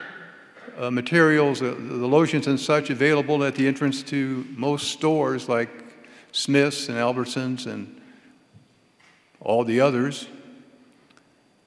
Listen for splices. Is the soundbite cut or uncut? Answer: uncut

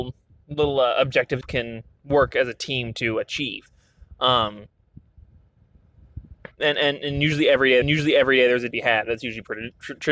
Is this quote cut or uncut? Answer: cut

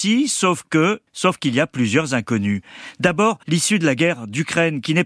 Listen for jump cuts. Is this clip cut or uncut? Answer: cut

